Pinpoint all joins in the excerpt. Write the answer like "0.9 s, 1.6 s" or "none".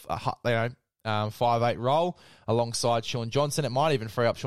none